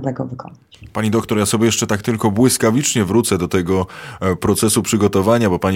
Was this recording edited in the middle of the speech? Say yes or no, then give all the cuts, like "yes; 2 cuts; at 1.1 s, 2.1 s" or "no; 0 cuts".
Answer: no; 0 cuts